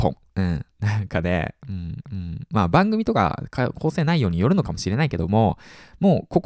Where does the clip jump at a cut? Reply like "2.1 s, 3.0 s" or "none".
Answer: 2.0 s

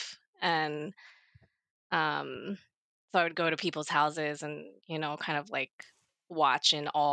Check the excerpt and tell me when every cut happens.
none

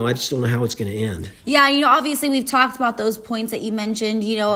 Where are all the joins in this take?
1.4 s

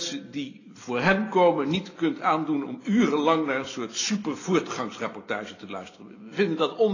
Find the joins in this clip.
none

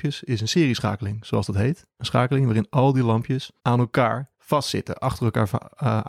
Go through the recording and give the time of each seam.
3.6 s, 4.3 s

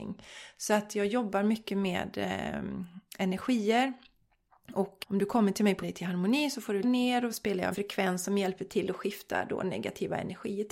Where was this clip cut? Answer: 5.0 s, 5.8 s, 6.8 s, 7.3 s, 7.7 s

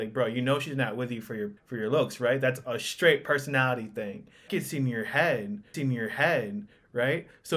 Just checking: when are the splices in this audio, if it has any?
1.6 s, 4.5 s, 5.7 s

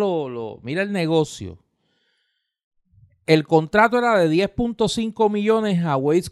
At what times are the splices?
none

